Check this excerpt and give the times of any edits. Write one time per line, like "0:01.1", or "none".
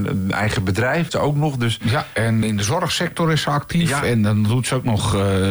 0:01.1
0:02.4